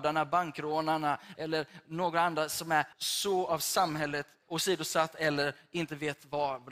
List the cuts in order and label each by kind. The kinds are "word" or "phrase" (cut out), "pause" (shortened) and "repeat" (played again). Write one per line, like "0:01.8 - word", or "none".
0:01.3 - phrase
0:02.9 - pause
0:04.4 - word

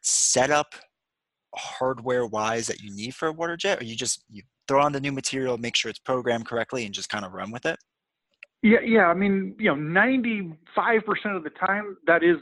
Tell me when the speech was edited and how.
none

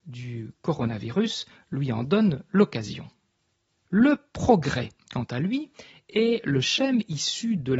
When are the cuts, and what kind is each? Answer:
none

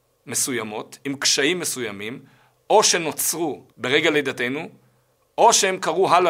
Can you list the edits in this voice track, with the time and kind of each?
none

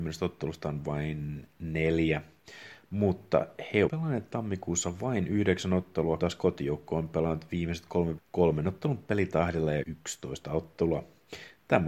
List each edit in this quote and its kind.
0:03.9 - word
0:06.2 - word
0:08.2 - word
0:09.8 - word

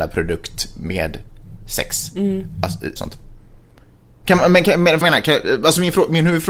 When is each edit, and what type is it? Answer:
0:03.0 - phrase
0:05.0 - word

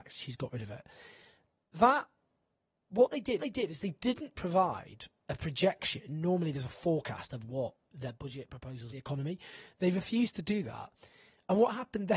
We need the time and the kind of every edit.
0:03.4 - repeat
0:04.4 - word
0:08.9 - phrase

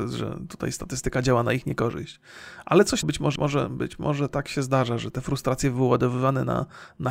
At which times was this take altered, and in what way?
0:03.0 - word
0:03.4 - phrase

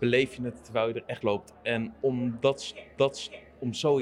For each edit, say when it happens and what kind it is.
0:01.2 - word
0:03.0 - repeat

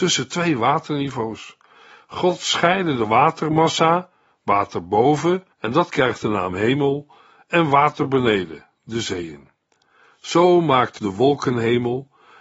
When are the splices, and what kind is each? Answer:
0:05.5 - pause
0:11.0 - word

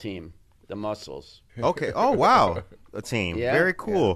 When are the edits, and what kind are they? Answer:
0:01.5 - pause
0:03.0 - word

